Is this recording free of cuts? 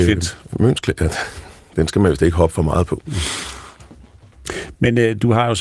yes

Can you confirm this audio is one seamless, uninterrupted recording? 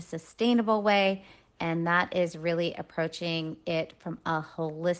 yes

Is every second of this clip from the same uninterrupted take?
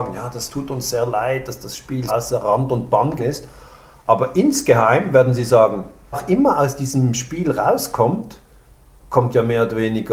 no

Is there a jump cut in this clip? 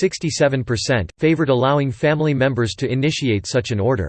no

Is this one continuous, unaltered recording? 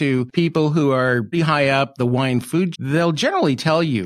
no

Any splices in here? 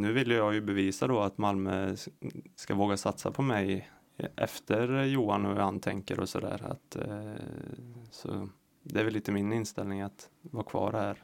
no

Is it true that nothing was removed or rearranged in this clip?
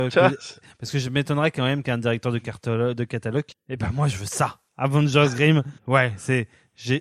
no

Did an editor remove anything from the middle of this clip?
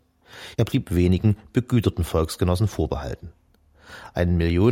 no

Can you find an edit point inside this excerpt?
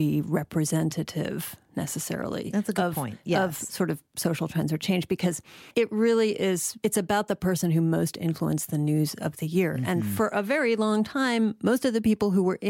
yes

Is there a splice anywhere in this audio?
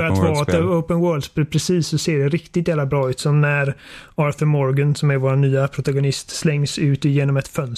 no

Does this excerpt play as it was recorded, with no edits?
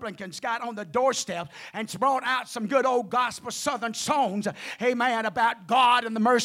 yes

